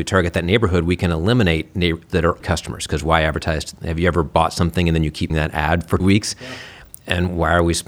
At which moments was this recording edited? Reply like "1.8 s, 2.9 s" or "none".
2.1 s, 2.4 s, 5.3 s, 6.0 s